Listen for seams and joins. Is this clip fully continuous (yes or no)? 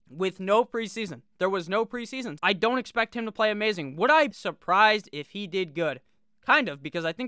no